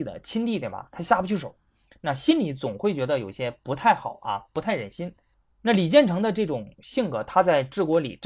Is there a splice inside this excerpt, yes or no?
no